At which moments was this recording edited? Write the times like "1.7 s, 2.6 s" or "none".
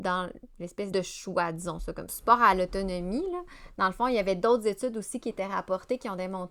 0.9 s, 2.1 s